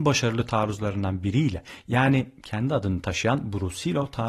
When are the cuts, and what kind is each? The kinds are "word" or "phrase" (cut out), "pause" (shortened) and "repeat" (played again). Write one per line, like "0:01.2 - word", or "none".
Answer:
none